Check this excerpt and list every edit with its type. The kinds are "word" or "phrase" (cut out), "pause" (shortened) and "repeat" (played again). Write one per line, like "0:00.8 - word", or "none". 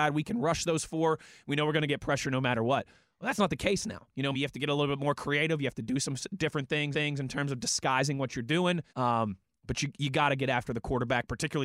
0:04.3 - word
0:06.9 - repeat
0:08.9 - pause